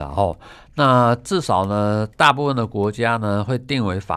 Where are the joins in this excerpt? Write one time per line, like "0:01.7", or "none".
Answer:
0:02.1